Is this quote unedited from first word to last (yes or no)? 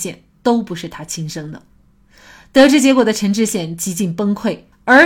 yes